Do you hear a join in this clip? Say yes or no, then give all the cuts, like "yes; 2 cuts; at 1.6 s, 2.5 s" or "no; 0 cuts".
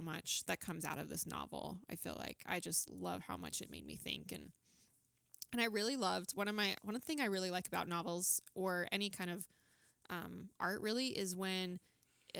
no; 0 cuts